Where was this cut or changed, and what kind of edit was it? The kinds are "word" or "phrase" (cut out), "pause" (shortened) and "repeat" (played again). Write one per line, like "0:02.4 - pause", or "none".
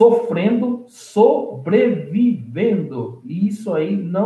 none